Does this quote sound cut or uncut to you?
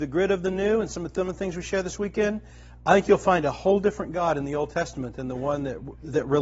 uncut